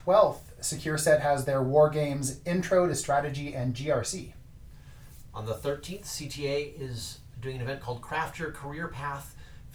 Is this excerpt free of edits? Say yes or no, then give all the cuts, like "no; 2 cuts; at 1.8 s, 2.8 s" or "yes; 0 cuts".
yes; 0 cuts